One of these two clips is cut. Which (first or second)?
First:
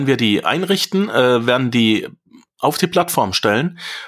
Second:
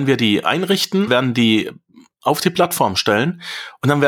second